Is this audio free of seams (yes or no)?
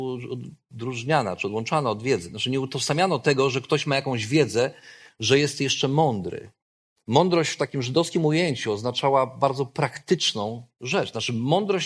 yes